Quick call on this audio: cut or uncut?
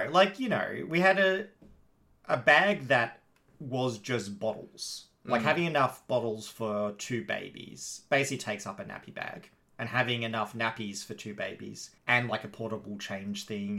cut